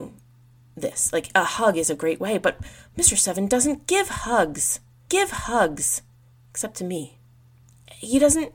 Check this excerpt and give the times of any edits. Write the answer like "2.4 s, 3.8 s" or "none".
5.1 s